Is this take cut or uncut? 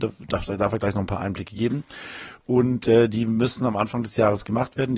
uncut